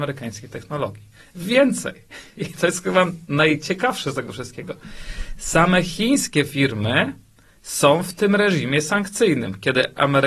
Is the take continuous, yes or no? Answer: yes